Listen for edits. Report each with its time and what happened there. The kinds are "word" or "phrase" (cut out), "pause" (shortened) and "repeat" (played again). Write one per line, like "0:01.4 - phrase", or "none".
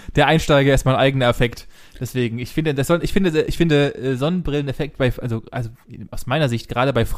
none